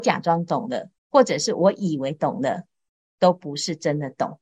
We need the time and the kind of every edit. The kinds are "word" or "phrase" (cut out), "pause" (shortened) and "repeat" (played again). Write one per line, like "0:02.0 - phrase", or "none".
0:01.0 - pause